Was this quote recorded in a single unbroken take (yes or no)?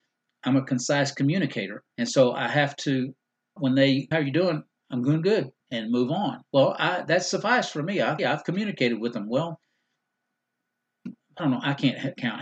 no